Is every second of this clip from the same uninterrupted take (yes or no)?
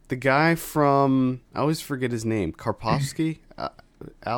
no